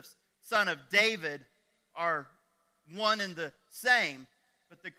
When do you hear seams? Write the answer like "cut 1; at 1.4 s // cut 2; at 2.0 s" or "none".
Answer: none